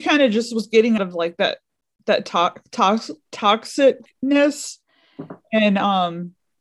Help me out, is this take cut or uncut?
cut